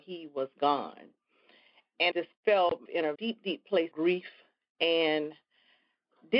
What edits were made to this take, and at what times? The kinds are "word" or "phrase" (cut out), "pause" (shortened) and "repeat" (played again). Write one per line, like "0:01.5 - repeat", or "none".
0:02.1 - word
0:02.9 - word
0:03.2 - word
0:03.9 - word